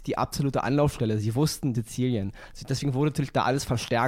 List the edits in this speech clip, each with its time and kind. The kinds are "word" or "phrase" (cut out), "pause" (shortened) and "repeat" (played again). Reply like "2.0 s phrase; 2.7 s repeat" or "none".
1.7 s phrase